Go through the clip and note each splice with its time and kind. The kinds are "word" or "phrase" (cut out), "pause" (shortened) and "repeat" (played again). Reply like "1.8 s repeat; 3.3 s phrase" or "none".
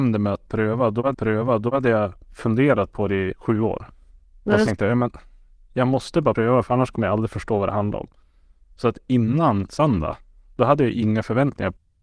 1.1 s repeat